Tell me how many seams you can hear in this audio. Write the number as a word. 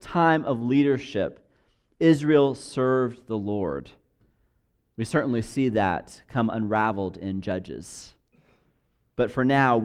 zero